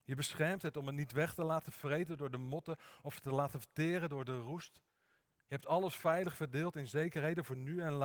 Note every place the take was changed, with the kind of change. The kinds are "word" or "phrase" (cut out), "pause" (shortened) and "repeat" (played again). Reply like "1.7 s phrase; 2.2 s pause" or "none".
none